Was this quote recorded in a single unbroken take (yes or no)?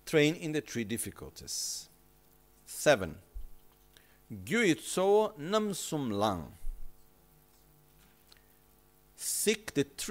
yes